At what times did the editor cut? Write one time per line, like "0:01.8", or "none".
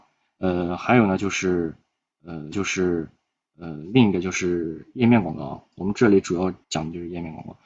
0:02.5
0:06.6